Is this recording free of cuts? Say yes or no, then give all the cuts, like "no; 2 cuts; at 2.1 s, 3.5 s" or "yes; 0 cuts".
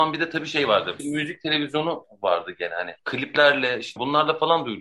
yes; 0 cuts